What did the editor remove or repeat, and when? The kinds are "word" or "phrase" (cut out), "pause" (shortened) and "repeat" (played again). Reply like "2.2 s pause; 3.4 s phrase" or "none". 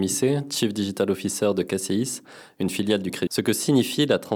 3.3 s word